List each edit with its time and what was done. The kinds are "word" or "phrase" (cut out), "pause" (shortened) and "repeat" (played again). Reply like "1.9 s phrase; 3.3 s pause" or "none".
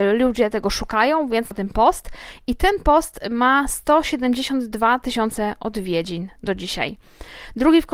1.5 s word